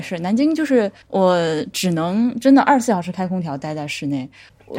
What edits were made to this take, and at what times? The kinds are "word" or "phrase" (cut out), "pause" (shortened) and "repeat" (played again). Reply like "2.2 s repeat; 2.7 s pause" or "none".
none